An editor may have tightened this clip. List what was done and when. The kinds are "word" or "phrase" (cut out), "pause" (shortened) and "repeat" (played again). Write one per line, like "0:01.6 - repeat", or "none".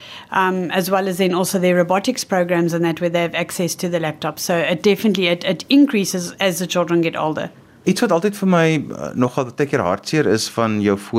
none